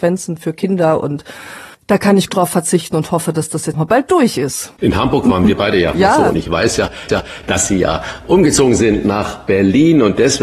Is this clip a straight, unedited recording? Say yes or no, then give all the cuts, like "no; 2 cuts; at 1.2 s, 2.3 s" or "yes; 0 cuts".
no; 5 cuts; at 1.7 s, 2.3 s, 3.7 s, 5.9 s, 7.1 s